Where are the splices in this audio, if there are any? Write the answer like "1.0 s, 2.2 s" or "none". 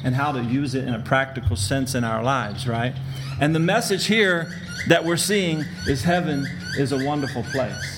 none